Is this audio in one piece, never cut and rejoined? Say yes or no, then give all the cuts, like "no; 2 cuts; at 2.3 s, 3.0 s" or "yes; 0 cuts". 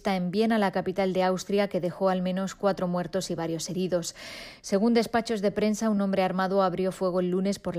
yes; 0 cuts